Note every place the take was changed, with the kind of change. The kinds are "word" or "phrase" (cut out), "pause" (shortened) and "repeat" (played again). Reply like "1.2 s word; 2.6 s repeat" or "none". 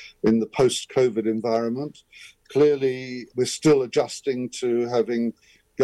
3.3 s word